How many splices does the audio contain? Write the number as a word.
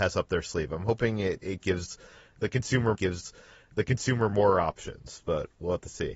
one